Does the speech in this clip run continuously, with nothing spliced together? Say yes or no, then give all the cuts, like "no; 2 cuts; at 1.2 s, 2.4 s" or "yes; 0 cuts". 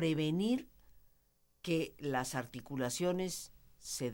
yes; 0 cuts